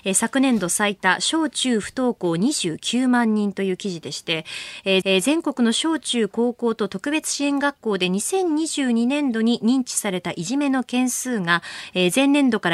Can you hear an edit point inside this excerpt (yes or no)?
yes